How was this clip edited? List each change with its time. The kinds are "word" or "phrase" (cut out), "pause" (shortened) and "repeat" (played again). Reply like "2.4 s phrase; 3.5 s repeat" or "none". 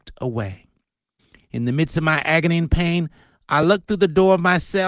none